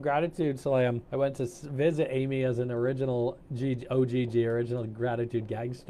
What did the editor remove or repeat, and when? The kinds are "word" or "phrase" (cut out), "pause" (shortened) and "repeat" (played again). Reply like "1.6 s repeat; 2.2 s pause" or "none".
1.0 s pause